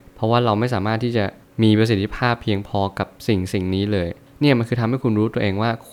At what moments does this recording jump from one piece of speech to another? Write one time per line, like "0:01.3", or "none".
none